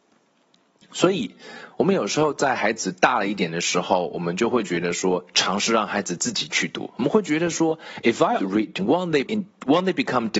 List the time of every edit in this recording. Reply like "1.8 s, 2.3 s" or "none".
8.4 s, 8.8 s, 9.2 s